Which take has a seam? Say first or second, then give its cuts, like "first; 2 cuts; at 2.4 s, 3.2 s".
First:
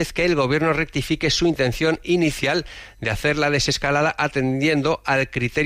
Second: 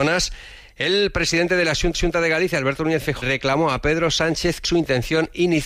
second; 3 cuts; at 1.9 s, 3.2 s, 4.6 s